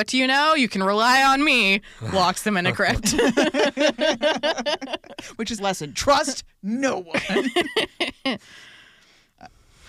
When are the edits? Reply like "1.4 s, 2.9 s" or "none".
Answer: 5.6 s

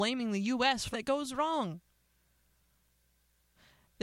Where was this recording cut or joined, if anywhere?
0.9 s

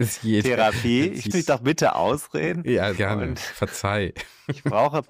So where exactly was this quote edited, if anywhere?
1.3 s, 3.0 s

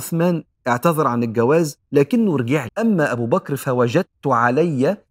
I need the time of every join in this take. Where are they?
2.7 s

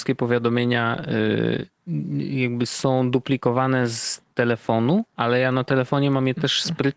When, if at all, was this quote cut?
5.1 s

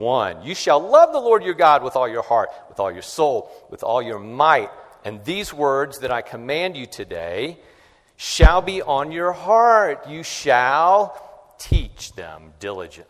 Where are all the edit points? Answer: none

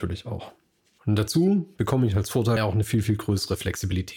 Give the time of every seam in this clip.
2.6 s

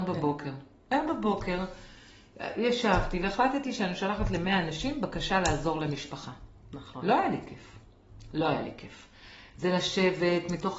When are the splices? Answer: none

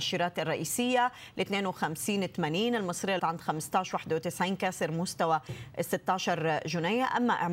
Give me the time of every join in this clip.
3.2 s

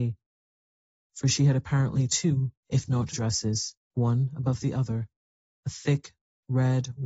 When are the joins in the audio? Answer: 2.6 s, 3.1 s, 3.8 s, 5.6 s

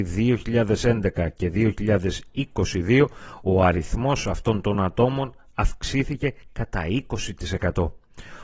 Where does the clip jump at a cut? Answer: none

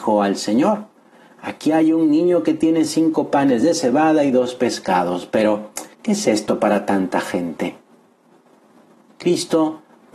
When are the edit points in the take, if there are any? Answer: 5.9 s

